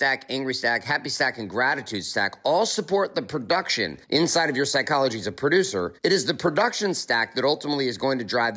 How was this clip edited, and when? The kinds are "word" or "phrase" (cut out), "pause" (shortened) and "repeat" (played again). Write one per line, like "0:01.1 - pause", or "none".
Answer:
0:04.0 - pause
0:06.0 - pause